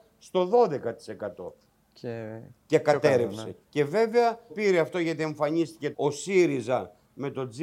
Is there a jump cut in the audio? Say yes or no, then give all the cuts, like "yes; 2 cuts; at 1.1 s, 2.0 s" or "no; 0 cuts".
yes; 4 cuts; at 2.6 s, 3.6 s, 4.5 s, 5.9 s